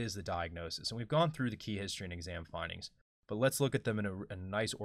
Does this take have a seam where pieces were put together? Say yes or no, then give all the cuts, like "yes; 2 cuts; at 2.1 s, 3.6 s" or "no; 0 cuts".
no; 0 cuts